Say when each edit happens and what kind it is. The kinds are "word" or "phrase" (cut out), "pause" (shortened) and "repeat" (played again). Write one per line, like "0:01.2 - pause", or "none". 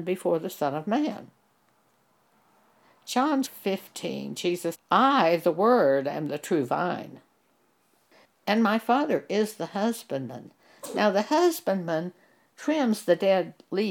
0:03.4 - word
0:04.7 - word